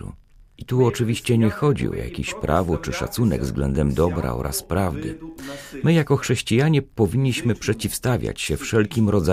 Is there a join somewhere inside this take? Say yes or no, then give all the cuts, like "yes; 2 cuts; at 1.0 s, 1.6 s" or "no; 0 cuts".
no; 0 cuts